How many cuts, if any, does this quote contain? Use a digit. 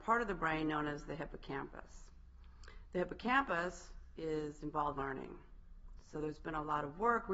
1